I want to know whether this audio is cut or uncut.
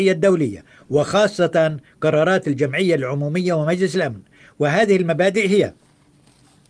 uncut